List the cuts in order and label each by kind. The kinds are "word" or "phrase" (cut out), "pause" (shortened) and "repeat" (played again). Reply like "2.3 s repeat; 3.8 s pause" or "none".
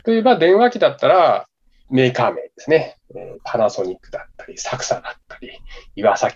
none